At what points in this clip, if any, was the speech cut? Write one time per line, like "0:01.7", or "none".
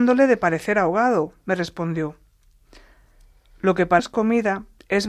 0:04.0